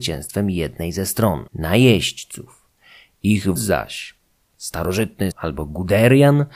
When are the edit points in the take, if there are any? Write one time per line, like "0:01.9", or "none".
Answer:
0:01.5
0:03.6
0:05.3